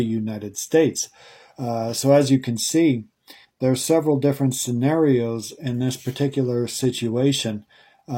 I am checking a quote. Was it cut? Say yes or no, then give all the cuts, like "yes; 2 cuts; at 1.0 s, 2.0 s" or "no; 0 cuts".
no; 0 cuts